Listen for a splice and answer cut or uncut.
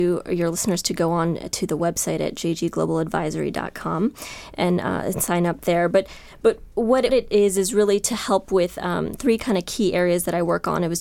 cut